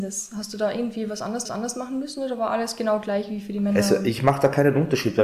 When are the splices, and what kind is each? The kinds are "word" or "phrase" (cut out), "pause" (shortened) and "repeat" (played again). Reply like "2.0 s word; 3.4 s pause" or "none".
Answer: 1.4 s repeat